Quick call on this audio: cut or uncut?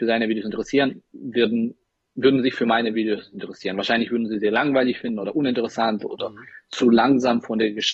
uncut